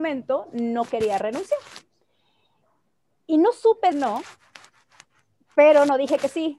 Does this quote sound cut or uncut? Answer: cut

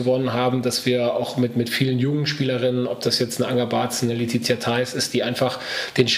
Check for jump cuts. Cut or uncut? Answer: uncut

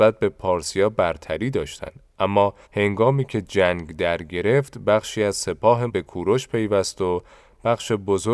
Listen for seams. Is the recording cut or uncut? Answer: cut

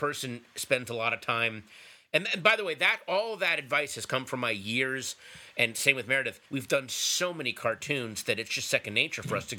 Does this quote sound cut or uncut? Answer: cut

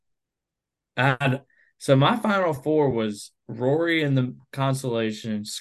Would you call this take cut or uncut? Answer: uncut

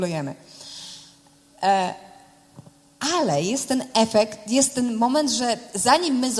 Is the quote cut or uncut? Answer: uncut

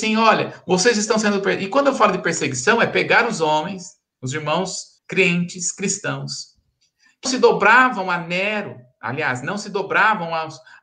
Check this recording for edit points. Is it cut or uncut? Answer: cut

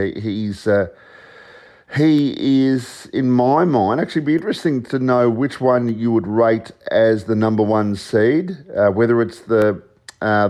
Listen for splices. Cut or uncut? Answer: uncut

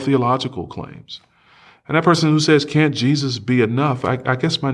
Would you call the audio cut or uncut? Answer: uncut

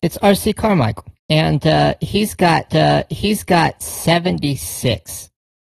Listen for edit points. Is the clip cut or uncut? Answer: cut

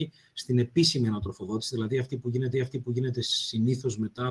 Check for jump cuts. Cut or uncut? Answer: cut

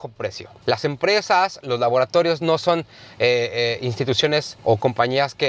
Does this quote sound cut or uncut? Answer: uncut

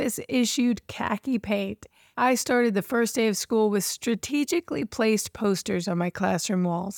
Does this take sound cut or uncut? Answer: uncut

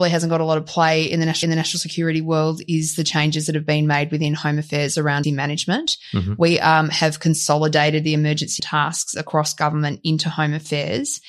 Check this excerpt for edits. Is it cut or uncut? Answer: cut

